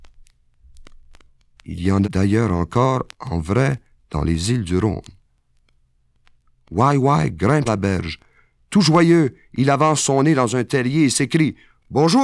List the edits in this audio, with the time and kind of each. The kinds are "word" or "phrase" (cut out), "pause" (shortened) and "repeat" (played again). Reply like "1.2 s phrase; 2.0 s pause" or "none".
2.0 s word; 3.1 s pause; 7.7 s word